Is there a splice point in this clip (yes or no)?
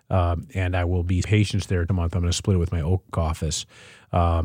yes